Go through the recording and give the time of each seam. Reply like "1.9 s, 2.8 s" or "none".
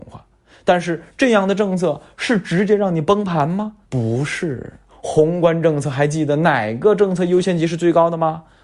3.8 s